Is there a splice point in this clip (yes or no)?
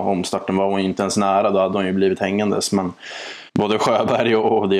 yes